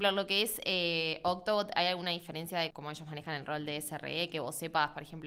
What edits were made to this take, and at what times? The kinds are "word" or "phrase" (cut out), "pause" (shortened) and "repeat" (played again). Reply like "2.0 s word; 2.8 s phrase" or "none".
2.7 s word